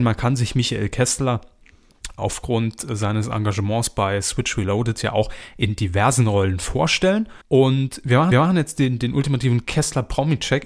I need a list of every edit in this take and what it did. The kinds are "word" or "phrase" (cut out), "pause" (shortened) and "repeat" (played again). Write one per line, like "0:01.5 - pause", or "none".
0:02.2 - word
0:07.4 - pause
0:08.3 - repeat